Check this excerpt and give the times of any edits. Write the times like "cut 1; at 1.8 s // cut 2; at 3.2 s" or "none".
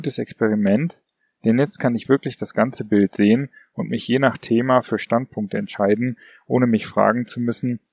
none